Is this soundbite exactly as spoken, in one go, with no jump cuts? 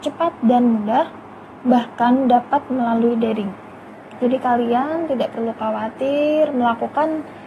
yes; 0 cuts

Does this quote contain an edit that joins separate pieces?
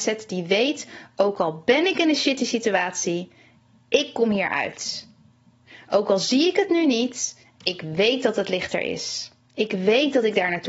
no; 0 cuts

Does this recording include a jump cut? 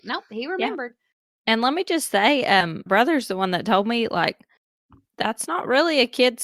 yes; 1 cut; at 2.9 s

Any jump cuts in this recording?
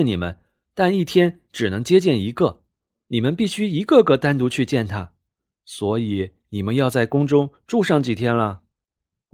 no; 0 cuts

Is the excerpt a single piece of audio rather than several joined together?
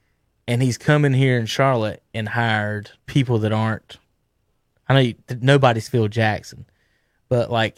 no; 1 cut; at 3.0 s

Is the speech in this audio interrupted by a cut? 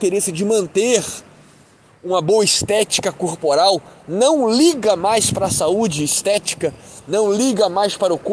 no; 0 cuts

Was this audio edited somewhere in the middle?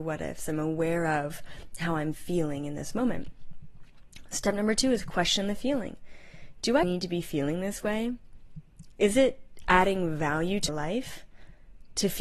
yes; 2 cuts; at 6.8 s, 10.7 s

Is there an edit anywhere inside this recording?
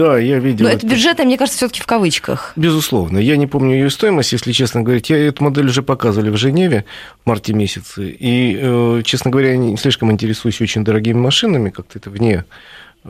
no; 0 cuts

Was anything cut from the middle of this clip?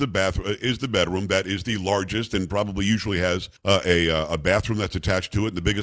yes; 1 cut; at 3.6 s

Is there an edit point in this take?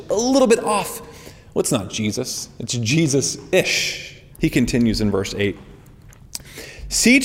yes; 1 cut; at 4.3 s

